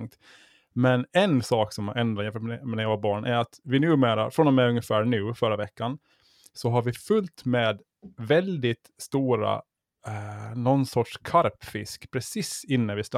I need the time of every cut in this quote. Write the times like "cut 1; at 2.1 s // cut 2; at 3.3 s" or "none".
none